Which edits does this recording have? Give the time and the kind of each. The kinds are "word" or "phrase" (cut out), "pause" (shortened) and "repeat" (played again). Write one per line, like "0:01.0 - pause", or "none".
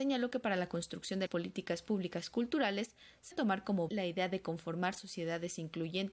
0:01.3 - word
0:03.3 - word
0:03.9 - word